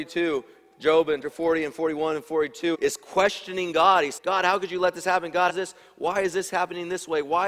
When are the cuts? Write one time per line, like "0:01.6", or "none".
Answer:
0:01.2
0:02.7
0:04.2
0:05.5